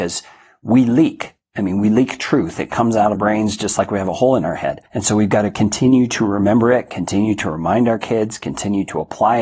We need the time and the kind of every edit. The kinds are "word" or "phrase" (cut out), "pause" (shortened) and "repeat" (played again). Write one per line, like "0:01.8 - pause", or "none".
0:03.1 - word
0:04.9 - pause